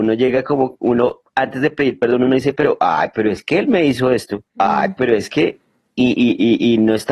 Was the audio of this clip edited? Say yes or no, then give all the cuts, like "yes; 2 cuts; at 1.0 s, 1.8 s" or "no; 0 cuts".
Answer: yes; 1 cut; at 4.5 s